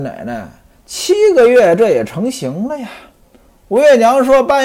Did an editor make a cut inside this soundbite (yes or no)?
no